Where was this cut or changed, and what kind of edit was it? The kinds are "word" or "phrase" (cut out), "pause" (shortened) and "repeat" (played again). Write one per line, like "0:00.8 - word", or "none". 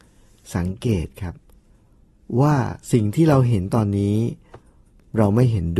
0:02.8 - pause